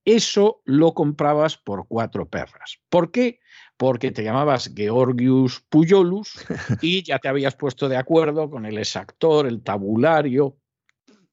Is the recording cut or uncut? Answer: uncut